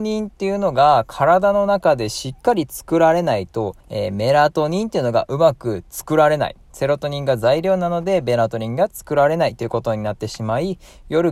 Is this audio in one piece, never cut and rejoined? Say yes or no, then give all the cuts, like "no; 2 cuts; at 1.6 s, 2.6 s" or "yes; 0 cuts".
no; 2 cuts; at 3.8 s, 6.6 s